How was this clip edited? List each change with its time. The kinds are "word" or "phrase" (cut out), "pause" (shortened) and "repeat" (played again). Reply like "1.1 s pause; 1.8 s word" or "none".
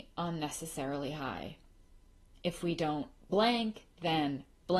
none

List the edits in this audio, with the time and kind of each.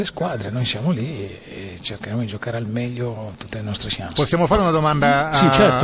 none

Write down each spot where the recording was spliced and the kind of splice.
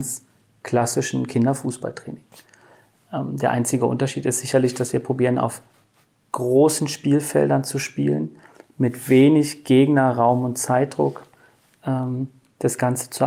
none

